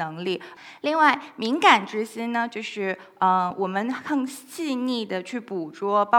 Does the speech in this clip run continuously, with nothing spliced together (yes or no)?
yes